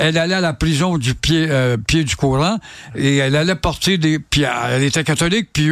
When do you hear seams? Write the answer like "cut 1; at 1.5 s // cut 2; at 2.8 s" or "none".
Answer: none